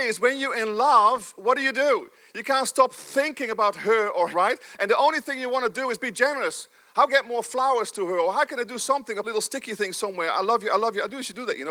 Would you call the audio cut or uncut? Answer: cut